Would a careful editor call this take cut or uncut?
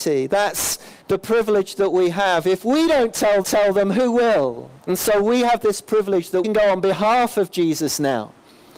cut